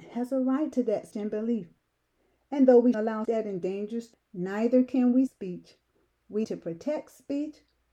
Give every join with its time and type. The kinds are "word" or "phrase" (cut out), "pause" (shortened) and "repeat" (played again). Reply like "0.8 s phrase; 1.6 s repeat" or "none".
1.1 s word; 2.9 s word; 3.2 s word; 4.1 s word; 5.3 s word; 6.4 s word